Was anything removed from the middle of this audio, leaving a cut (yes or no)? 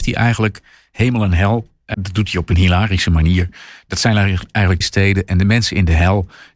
yes